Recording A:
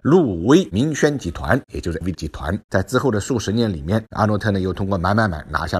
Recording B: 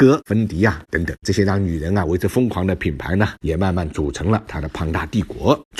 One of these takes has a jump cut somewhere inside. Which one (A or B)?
A